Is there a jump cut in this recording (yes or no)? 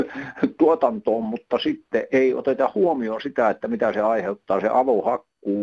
no